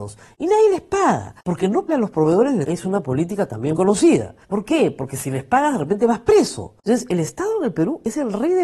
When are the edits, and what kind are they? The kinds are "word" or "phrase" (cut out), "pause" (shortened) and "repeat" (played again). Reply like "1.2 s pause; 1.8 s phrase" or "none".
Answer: 1.4 s pause; 1.9 s word; 2.6 s word; 3.8 s word; 4.4 s pause; 6.8 s pause